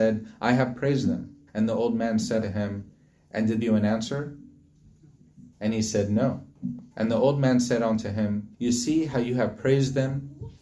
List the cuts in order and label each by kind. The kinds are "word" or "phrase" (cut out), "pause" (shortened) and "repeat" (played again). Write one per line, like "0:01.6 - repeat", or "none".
0:01.5 - pause
0:02.4 - word
0:03.6 - phrase
0:05.5 - pause
0:06.9 - pause
0:08.5 - pause

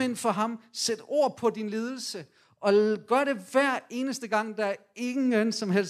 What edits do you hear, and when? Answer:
none

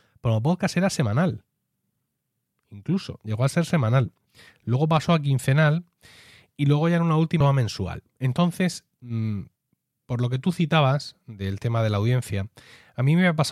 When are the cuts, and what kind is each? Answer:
0:07.4 - phrase

